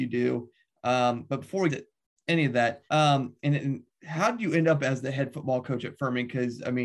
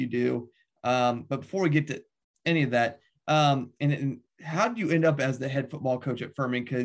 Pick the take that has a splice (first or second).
first